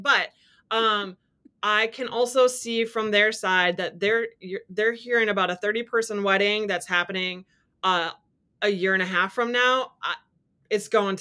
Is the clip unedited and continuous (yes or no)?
yes